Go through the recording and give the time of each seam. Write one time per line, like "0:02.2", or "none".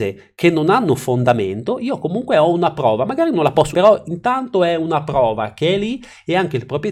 0:03.7